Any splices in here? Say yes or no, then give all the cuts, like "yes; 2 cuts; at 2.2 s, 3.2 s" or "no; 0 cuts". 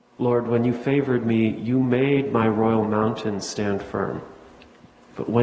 no; 0 cuts